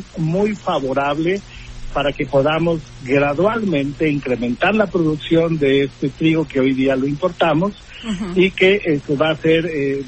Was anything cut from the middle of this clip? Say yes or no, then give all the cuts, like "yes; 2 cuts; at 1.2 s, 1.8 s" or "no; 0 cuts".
no; 0 cuts